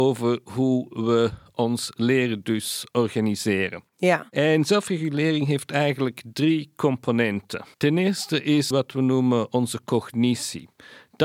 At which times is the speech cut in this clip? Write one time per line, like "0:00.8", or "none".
0:07.7
0:08.7

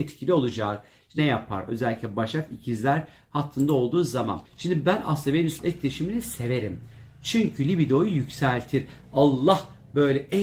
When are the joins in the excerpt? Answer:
0:01.2
0:04.4
0:05.6

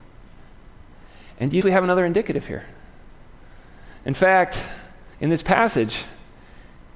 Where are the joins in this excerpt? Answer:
0:01.6
0:05.1

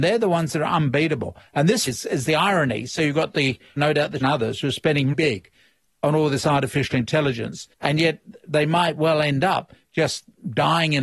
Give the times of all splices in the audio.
0:01.9
0:03.8
0:04.2
0:05.1
0:07.7

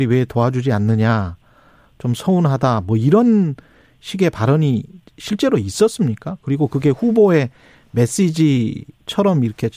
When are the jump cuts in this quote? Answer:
none

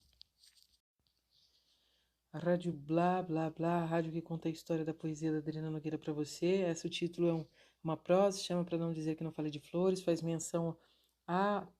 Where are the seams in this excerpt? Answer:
none

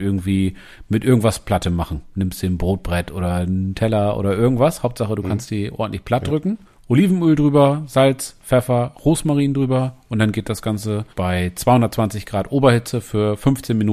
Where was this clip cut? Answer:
0:06.7
0:11.1

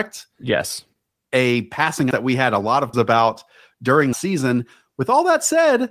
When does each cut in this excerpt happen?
0:02.1
0:02.9
0:04.1

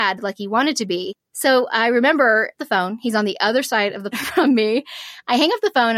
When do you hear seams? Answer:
0:02.6
0:04.1

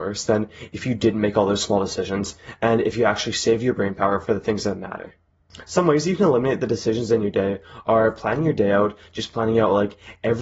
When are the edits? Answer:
none

